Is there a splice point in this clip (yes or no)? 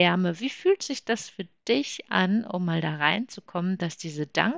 no